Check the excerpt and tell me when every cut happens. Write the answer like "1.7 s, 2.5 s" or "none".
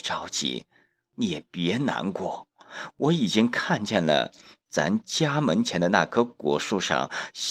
none